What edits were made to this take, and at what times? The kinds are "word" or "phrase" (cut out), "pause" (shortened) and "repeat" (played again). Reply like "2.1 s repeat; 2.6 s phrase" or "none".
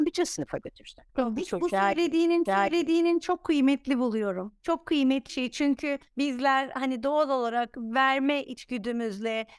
1.1 s pause; 2.5 s repeat; 4.6 s pause; 5.3 s word; 6.1 s pause